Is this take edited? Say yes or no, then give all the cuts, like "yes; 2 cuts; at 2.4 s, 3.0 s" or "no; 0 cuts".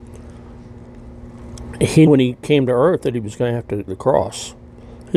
yes; 2 cuts; at 2.1 s, 3.9 s